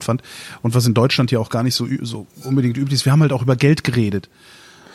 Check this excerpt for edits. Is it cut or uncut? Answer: uncut